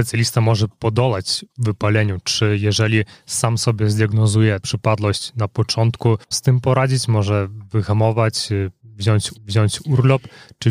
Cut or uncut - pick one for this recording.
cut